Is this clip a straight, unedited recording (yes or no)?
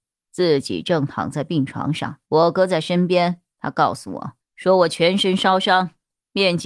no